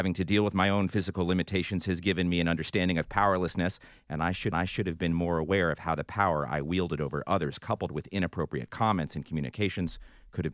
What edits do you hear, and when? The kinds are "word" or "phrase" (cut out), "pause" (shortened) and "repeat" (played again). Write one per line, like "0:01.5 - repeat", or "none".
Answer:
0:04.5 - repeat